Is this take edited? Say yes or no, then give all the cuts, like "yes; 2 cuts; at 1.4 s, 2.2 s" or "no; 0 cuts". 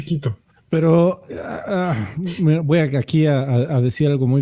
no; 0 cuts